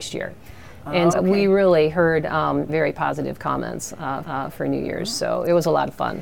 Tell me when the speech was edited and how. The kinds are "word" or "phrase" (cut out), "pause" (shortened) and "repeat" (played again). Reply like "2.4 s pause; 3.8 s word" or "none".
1.1 s word; 2.7 s word; 4.2 s repeat